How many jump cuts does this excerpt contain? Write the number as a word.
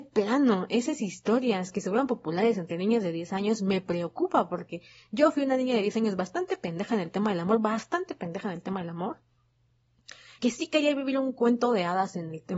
one